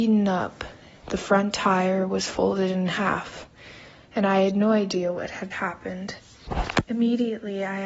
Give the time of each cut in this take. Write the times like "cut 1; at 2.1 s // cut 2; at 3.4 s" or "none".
cut 1; at 5.5 s